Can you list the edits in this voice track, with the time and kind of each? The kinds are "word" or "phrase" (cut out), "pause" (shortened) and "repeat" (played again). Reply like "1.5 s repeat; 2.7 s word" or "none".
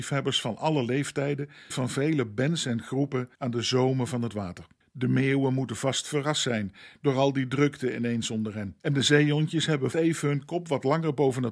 1.7 s word; 3.3 s pause; 4.8 s pause; 8.8 s pause; 9.9 s word